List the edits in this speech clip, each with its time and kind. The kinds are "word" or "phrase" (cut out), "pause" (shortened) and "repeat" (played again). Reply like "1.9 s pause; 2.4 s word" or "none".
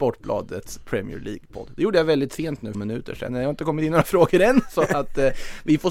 2.7 s phrase; 3.3 s word

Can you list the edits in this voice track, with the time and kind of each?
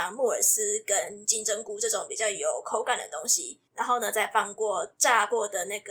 3.7 s pause

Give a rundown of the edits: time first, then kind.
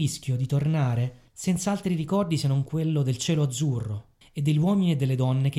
1.3 s pause; 4.2 s pause

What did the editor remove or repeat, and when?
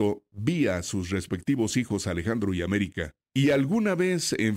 3.2 s pause

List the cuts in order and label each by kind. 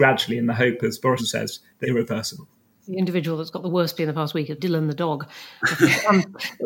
1.2 s word; 1.8 s word; 2.9 s word; 4.0 s word; 4.6 s word

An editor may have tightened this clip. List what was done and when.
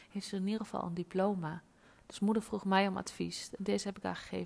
none

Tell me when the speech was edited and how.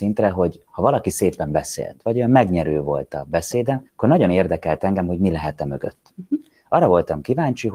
3.9 s pause

